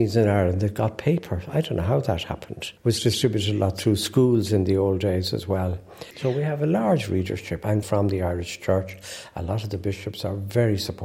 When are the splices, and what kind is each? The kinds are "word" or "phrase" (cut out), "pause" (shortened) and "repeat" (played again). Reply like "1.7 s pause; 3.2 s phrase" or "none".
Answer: 2.8 s pause; 7.8 s phrase